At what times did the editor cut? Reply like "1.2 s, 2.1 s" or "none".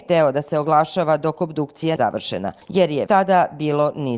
2.0 s, 2.6 s, 3.1 s

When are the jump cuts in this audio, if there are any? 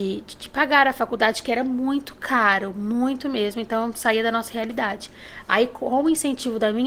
none

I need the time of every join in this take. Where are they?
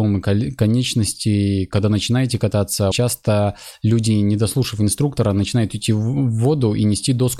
2.9 s

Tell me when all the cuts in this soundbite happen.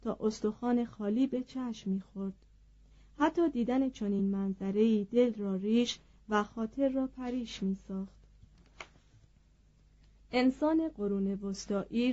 none

